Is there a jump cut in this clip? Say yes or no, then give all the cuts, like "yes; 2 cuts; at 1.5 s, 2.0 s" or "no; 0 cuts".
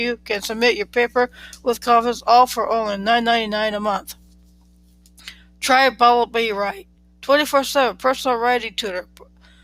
no; 0 cuts